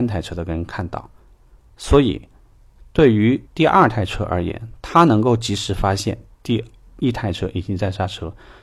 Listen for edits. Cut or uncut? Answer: cut